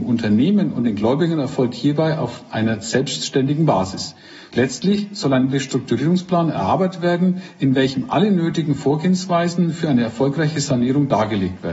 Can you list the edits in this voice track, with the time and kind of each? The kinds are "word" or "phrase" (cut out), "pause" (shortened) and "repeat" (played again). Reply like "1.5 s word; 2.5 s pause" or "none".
none

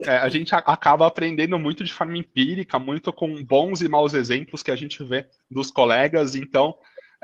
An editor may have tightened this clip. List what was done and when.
5.4 s pause

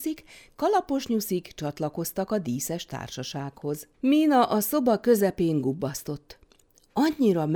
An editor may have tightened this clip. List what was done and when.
3.9 s pause

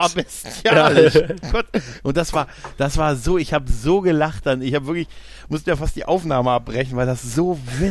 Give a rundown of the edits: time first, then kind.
none

